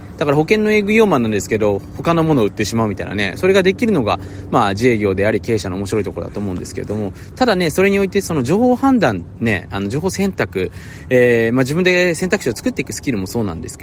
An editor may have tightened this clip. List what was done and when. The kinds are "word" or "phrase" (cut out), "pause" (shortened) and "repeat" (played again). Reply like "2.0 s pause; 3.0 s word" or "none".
none

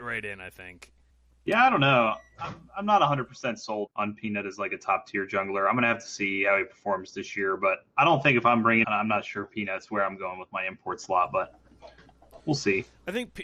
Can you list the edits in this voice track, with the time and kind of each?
1.1 s pause; 3.9 s word; 8.8 s phrase

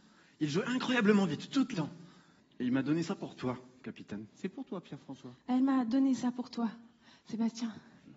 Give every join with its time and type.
1.7 s phrase; 2.4 s pause; 4.3 s pause

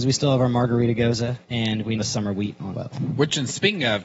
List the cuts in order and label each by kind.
1.4 s pause; 2.0 s phrase; 2.7 s word

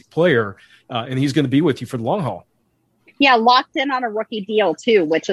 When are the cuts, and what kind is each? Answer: none

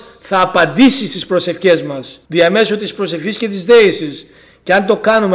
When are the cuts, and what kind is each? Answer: 2.3 s pause

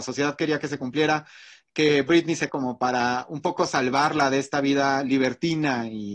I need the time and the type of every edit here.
2.5 s word

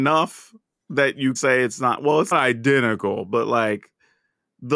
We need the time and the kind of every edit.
1.4 s word; 2.3 s word

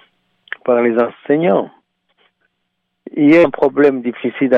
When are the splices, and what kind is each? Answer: 3.4 s word

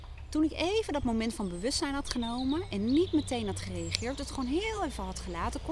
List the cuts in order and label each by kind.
none

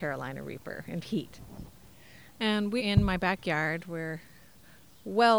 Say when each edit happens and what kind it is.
1.0 s phrase; 2.8 s word

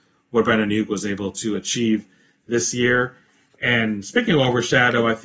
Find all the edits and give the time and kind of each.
none

